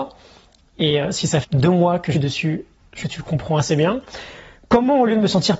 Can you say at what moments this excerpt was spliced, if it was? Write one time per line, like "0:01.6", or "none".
0:01.4
0:02.1
0:03.0

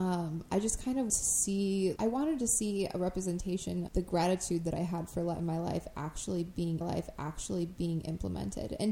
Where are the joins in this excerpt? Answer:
0:01.1
0:02.0
0:03.9
0:06.8

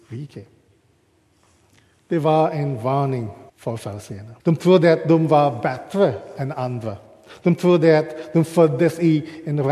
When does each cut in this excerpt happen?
0:03.5
0:04.4

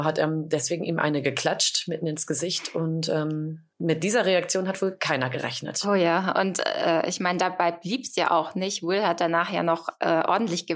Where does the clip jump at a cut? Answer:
0:03.7

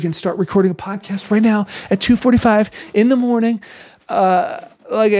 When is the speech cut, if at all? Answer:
none

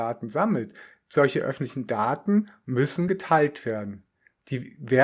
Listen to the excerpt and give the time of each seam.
none

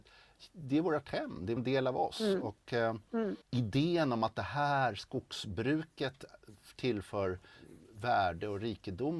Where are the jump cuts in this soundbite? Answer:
0:01.6
0:03.4

